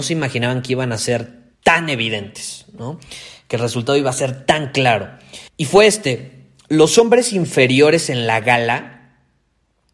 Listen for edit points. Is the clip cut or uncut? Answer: cut